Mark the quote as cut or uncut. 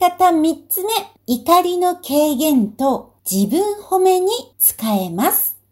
cut